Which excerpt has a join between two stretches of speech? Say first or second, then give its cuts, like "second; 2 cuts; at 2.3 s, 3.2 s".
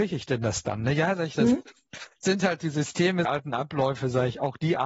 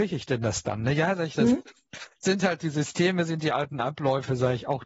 first; 1 cut; at 3.2 s